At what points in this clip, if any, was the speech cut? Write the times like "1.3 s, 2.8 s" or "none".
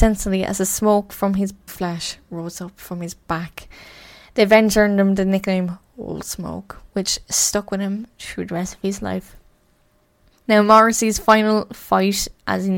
1.7 s